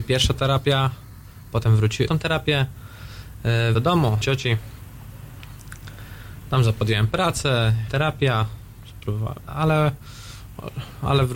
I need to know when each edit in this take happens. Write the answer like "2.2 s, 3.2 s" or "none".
2.1 s, 3.7 s, 4.2 s, 7.9 s, 9.4 s